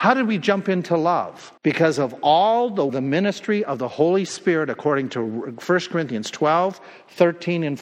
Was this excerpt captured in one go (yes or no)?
no